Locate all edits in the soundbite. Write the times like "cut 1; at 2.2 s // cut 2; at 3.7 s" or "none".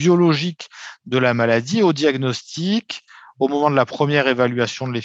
none